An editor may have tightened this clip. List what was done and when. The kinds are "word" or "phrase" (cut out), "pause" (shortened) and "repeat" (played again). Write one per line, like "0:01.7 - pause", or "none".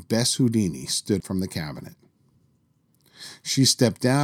0:01.2 - word